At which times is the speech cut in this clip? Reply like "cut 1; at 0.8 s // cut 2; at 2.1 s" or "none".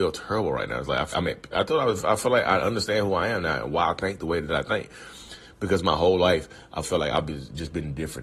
cut 1; at 1.1 s // cut 2; at 6.8 s